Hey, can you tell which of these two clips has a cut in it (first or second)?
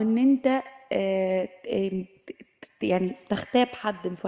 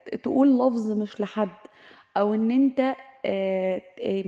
second